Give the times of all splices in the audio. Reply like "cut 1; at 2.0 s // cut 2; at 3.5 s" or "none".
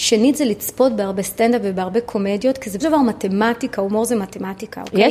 cut 1; at 2.8 s